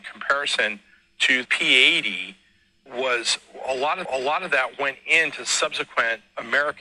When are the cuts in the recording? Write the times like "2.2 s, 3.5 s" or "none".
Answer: 1.4 s, 2.9 s, 4.0 s